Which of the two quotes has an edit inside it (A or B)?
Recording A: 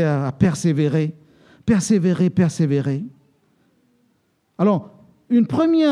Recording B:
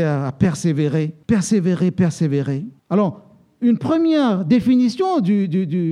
B